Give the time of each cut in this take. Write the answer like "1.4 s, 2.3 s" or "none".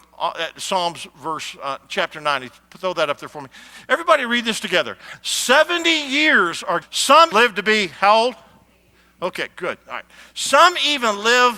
6.8 s, 7.3 s